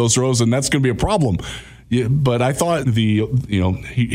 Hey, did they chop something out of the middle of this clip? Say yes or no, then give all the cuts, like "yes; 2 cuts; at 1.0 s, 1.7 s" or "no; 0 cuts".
yes; 1 cut; at 2.8 s